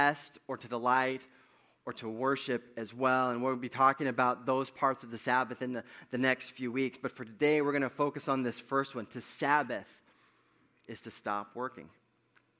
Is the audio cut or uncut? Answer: uncut